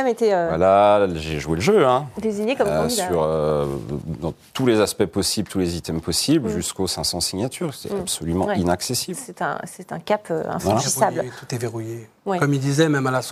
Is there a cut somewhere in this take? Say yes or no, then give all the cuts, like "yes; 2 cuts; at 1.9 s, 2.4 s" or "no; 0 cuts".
no; 0 cuts